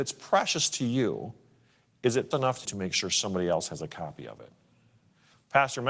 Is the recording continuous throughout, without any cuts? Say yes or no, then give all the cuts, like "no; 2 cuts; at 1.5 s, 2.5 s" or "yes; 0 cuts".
no; 2 cuts; at 2.3 s, 2.6 s